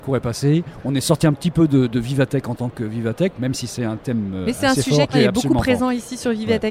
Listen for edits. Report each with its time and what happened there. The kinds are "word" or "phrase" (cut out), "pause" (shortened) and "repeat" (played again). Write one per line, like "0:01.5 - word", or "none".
0:05.1 - phrase